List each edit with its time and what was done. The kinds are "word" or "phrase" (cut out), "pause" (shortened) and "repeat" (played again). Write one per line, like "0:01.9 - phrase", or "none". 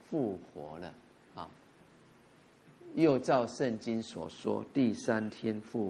none